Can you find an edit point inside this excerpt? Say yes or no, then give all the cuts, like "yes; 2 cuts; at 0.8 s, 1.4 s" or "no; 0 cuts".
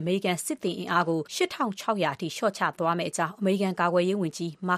yes; 1 cut; at 1.3 s